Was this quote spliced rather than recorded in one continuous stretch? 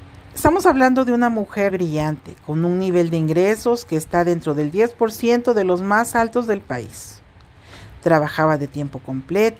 yes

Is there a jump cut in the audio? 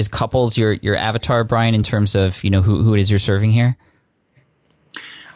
no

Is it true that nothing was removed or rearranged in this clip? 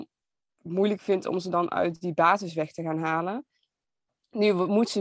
yes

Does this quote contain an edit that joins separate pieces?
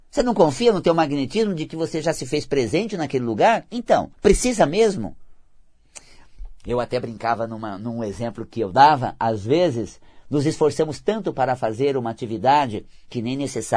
yes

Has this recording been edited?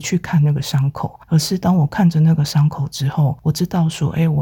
yes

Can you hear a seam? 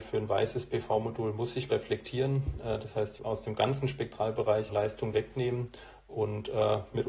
yes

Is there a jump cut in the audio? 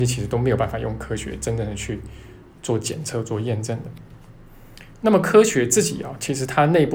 no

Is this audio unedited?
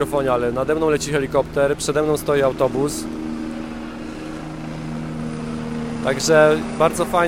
yes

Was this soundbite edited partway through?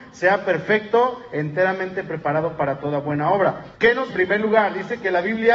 yes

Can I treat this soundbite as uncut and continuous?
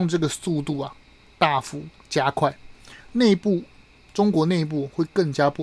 yes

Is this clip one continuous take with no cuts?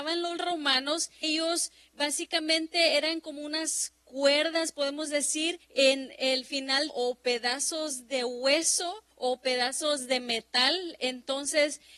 no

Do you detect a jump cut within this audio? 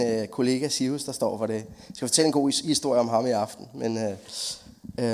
no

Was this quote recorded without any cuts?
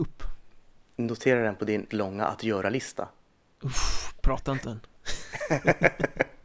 no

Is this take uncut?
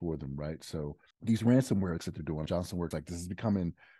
no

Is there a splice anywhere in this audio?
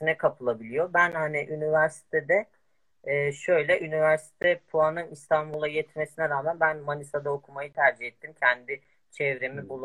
no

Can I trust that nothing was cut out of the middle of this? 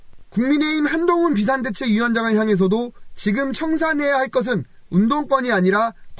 yes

